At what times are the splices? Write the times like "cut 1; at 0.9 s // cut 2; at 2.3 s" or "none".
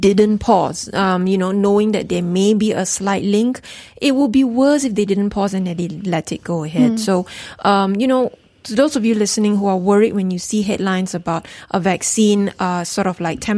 none